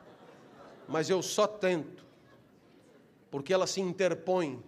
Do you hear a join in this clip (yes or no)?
no